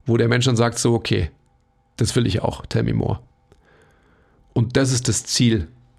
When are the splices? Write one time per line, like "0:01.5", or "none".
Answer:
none

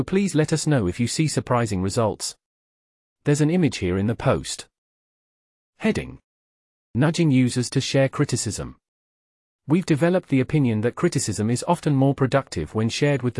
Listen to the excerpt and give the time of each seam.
none

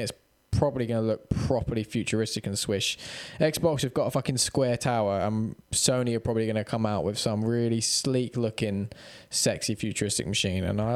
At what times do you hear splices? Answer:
none

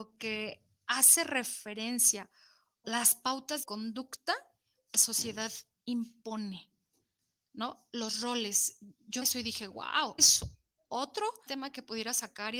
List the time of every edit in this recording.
0:02.8
0:03.6
0:04.9
0:09.2
0:10.2
0:11.5

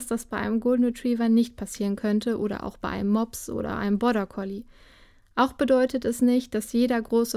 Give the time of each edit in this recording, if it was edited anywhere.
none

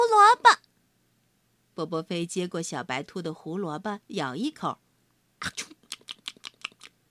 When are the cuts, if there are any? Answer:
0:04.0

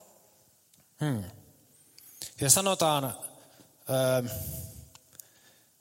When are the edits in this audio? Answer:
none

